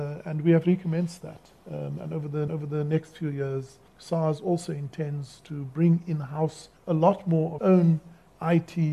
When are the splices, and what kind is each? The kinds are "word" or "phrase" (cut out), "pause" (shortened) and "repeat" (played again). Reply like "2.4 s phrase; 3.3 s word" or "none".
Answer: 1.6 s pause; 2.5 s repeat; 3.9 s pause; 6.8 s pause; 7.6 s word